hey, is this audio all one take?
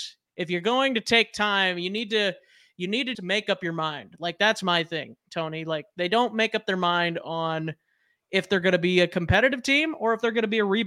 no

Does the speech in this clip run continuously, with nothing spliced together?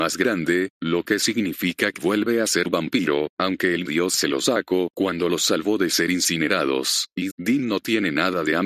no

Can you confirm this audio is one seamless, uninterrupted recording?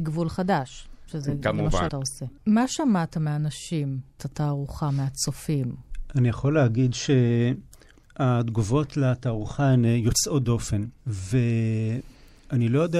no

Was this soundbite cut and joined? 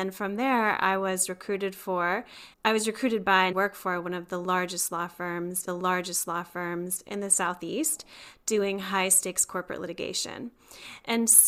yes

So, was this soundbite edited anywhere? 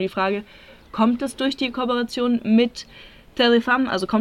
no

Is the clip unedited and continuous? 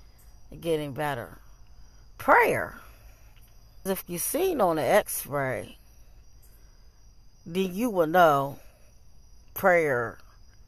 no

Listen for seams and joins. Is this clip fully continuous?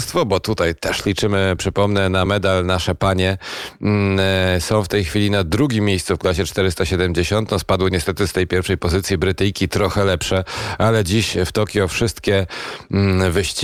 yes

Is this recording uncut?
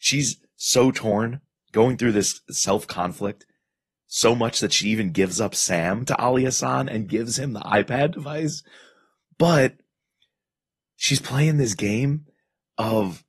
yes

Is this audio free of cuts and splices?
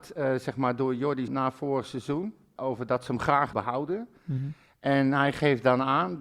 no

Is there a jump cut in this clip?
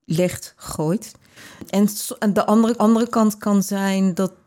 yes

